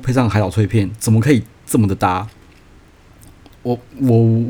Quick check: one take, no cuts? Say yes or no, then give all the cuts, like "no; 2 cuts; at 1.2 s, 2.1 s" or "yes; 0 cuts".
yes; 0 cuts